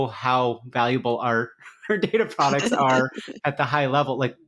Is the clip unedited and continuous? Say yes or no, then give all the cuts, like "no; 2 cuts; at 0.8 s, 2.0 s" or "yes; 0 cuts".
yes; 0 cuts